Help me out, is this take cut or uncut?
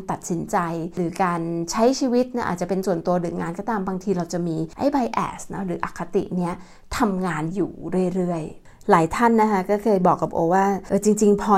uncut